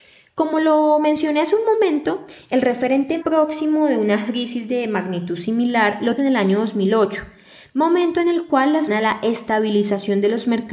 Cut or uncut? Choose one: cut